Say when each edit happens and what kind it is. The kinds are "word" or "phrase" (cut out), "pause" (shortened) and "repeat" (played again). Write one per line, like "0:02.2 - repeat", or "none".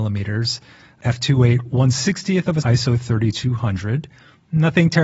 0:02.6 - word